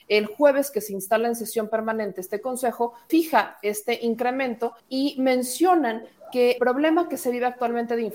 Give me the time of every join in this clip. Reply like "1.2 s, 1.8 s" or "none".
3.1 s, 4.8 s, 6.6 s